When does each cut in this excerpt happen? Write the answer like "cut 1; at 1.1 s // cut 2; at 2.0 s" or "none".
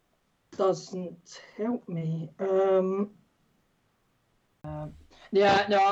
none

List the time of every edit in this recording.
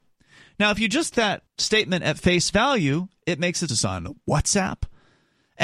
cut 1; at 1.1 s // cut 2; at 1.5 s // cut 3; at 3.7 s

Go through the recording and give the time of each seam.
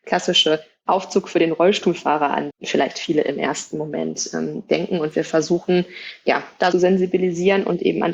cut 1; at 2.5 s // cut 2; at 6.7 s

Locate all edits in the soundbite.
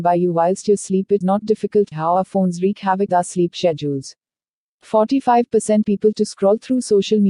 cut 1; at 1.2 s // cut 2; at 1.9 s // cut 3; at 3.1 s // cut 4; at 5.8 s // cut 5; at 6.1 s

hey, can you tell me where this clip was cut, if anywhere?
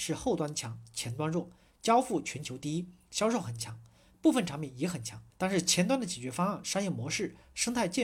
cut 1; at 5.3 s

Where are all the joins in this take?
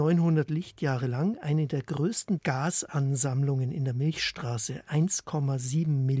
cut 1; at 2.4 s

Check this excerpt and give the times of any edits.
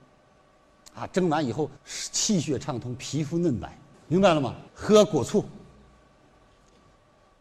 cut 1; at 1.8 s // cut 2; at 3.9 s // cut 3; at 4.7 s

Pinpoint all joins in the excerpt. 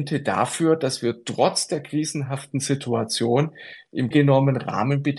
cut 1; at 4.1 s

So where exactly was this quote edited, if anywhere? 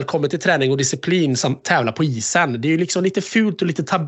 cut 1; at 1.6 s

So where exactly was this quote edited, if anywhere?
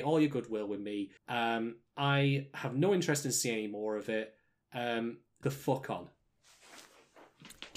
cut 1; at 1.2 s // cut 2; at 5.4 s

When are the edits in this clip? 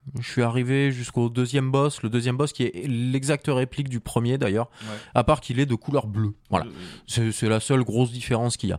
cut 1; at 6.4 s

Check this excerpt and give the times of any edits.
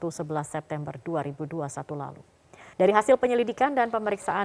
cut 1; at 2.7 s

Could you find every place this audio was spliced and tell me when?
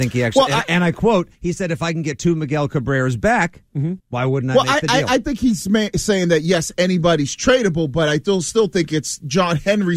cut 1; at 1.3 s // cut 2; at 4.0 s

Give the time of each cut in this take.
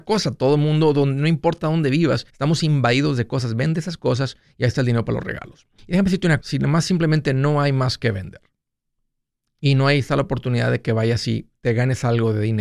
cut 1; at 2.3 s // cut 2; at 5.8 s // cut 3; at 6.4 s // cut 4; at 9.0 s

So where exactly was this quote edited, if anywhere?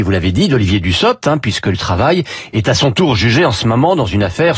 cut 1; at 1.7 s

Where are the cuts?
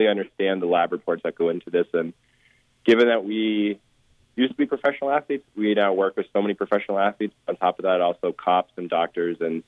none

